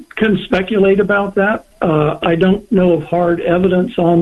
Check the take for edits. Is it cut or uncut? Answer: uncut